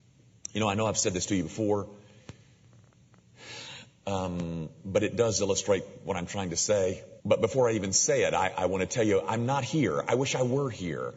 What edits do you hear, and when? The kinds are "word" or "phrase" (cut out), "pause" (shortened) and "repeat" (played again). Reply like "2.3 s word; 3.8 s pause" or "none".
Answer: 7.2 s pause

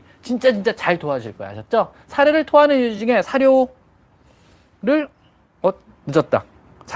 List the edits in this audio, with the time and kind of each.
none

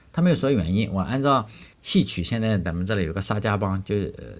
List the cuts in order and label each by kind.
1.7 s pause

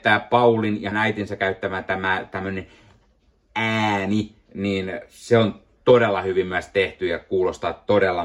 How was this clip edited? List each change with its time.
0.9 s word

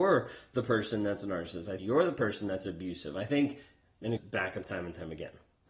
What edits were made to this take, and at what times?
1.8 s word; 4.2 s word; 4.6 s word

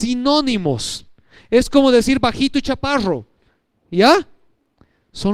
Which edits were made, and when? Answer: none

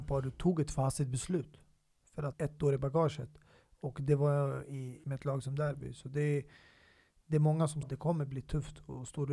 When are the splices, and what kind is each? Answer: 2.3 s phrase; 5.0 s word; 7.8 s word

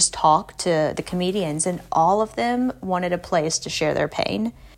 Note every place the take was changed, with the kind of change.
none

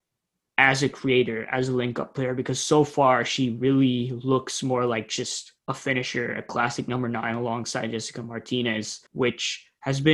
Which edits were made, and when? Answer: 5.6 s pause; 9.1 s pause

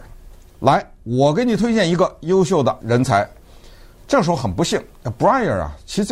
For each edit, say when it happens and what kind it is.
none

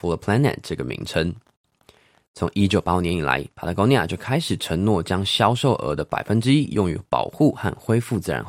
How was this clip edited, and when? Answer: none

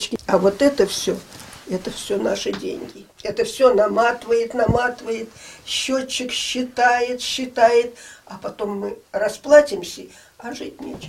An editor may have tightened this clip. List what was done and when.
3.1 s pause; 9.1 s pause

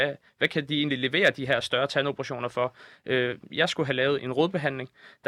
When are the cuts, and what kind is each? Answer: 4.2 s word

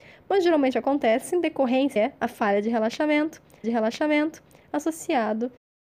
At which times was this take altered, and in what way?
2.0 s phrase; 3.6 s repeat

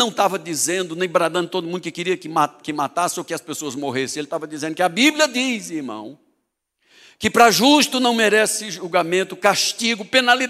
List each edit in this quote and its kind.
none

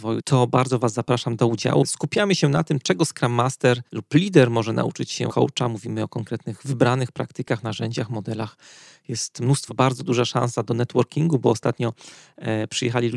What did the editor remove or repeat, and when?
3.9 s pause; 5.3 s word; 9.7 s word

